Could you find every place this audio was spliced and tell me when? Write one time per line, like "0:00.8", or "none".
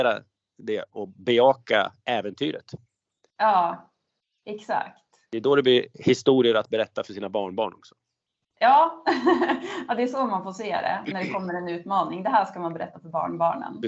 0:04.2